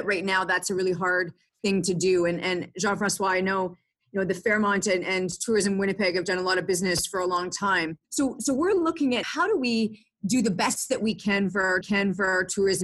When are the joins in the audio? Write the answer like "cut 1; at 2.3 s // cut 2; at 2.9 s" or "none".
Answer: cut 1; at 8.0 s // cut 2; at 9.2 s // cut 3; at 11.8 s